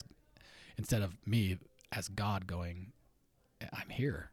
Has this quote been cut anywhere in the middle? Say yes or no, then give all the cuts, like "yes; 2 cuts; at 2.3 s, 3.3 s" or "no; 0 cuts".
no; 0 cuts